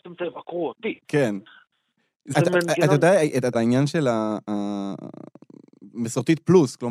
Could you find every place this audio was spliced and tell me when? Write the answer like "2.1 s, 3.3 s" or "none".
2.3 s, 3.5 s